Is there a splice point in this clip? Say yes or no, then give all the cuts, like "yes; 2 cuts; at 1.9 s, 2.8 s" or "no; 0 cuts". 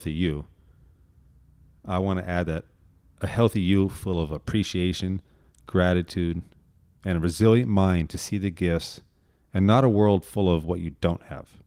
no; 0 cuts